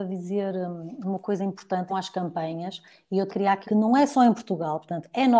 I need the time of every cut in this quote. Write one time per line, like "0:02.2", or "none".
0:01.9
0:03.3
0:03.6